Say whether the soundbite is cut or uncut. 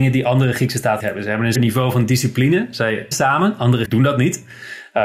cut